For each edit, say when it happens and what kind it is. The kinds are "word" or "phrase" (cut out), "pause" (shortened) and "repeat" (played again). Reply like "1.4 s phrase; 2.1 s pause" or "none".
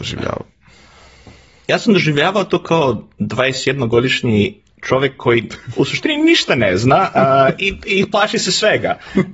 none